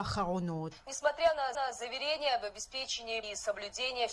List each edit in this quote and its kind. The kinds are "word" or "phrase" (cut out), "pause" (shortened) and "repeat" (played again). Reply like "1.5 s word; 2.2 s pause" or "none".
1.5 s repeat; 3.2 s word

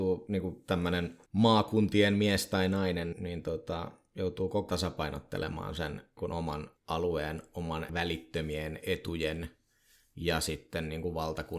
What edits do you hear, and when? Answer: 1.3 s pause; 3.1 s word; 4.7 s word; 6.2 s word; 6.8 s pause; 7.9 s word

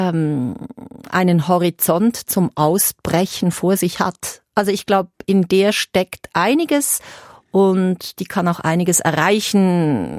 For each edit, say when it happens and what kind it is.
none

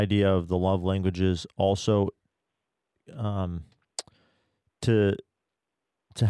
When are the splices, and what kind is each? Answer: none

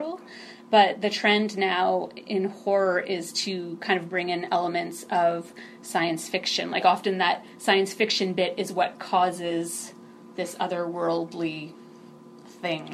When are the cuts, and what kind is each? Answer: none

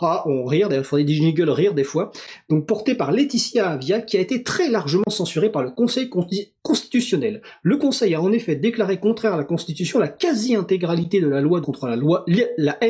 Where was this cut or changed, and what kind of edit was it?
11.6 s word

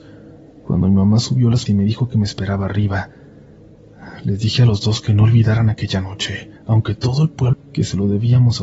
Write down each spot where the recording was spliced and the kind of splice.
1.7 s word; 6.6 s pause; 7.5 s phrase

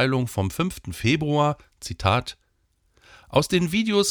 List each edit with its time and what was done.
none

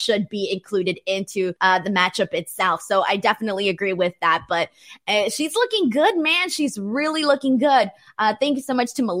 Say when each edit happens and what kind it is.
1.6 s pause

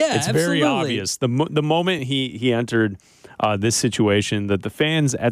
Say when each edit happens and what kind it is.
none

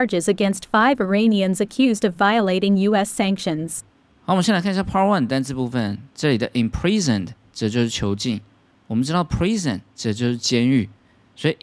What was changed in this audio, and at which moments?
none

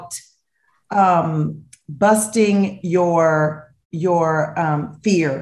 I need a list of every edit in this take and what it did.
3.8 s pause

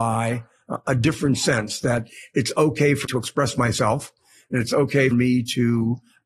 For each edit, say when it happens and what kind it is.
3.0 s word; 5.1 s word

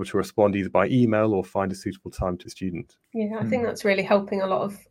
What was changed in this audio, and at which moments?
2.5 s word; 3.0 s pause

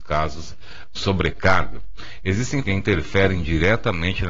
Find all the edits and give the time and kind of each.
1.0 s word; 2.6 s word

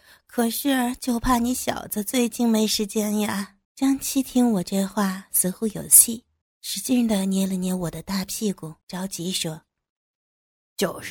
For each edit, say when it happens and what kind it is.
3.6 s pause; 6.4 s pause; 8.8 s pause

